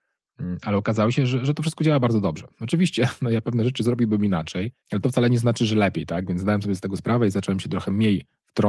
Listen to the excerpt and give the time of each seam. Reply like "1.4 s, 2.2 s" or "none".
4.8 s